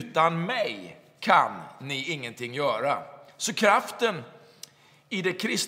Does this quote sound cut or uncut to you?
uncut